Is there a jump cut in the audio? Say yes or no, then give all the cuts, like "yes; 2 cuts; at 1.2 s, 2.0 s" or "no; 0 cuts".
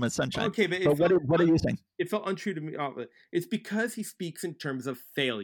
no; 0 cuts